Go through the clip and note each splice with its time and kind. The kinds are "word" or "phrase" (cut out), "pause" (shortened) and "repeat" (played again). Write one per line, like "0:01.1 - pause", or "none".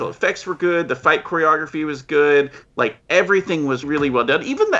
0:03.8 - word